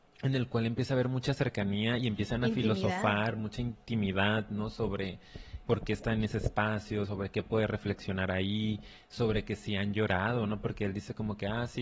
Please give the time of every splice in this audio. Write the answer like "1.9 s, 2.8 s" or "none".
5.7 s, 7.0 s